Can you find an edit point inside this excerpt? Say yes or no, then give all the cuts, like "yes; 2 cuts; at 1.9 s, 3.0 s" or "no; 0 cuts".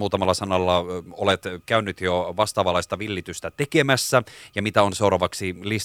no; 0 cuts